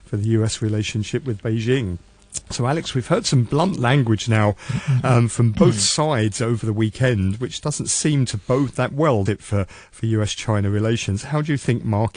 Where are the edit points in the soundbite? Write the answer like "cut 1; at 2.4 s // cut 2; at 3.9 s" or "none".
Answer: cut 1; at 9.3 s